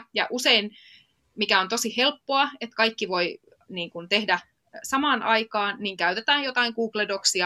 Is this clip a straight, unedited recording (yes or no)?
yes